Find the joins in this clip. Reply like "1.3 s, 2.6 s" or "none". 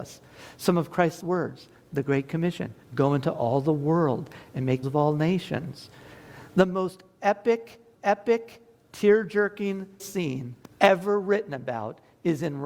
1.2 s, 2.8 s, 4.8 s, 7.9 s, 10.0 s, 10.7 s

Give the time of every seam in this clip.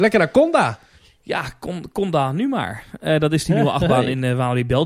none

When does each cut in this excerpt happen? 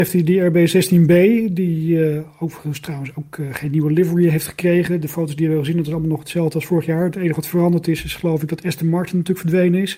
none

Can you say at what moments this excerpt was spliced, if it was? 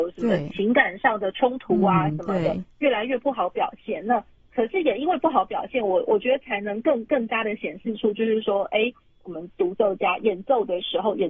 none

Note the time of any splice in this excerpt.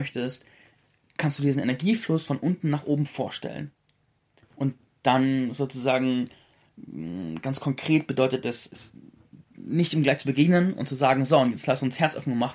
none

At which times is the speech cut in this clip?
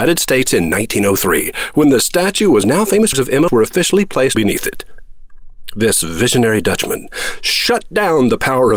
2.6 s, 3.1 s, 3.5 s, 4.3 s

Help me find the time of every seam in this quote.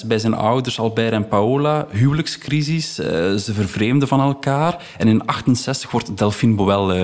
none

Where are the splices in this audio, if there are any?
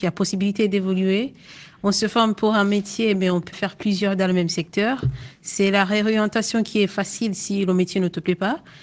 3.5 s

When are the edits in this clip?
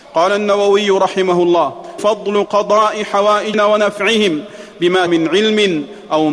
2.0 s, 2.5 s, 3.5 s, 5.1 s

